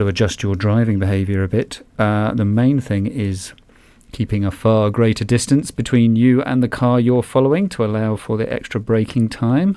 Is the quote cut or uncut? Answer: uncut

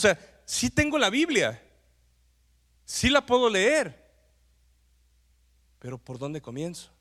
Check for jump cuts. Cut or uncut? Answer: uncut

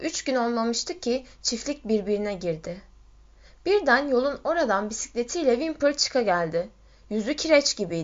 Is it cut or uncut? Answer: uncut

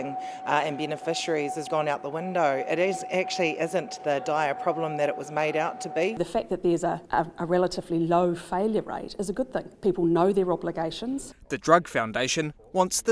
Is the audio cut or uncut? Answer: cut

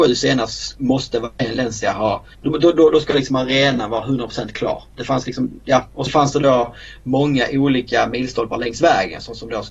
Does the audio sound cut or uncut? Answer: cut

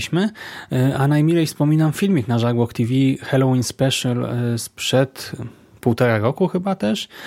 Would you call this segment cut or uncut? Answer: uncut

